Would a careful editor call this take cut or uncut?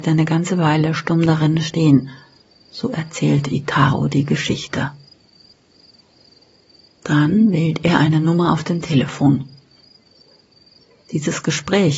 uncut